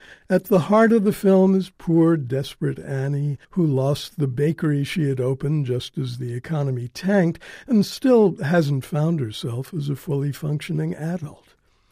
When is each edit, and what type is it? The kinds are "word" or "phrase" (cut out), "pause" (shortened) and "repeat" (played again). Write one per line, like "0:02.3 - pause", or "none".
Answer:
0:03.4 - pause